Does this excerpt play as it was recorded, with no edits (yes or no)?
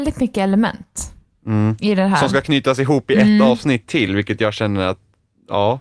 yes